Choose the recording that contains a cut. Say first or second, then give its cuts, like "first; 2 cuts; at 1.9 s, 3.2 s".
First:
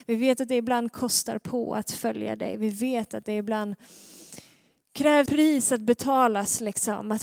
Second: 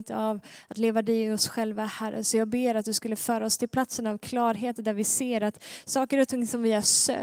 first; 1 cut; at 5.3 s